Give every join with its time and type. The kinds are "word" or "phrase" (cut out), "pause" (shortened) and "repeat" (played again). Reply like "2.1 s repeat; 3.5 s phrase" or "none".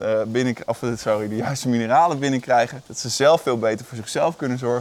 2.9 s pause